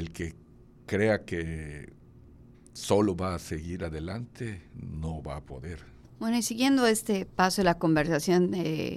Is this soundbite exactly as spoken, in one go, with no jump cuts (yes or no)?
yes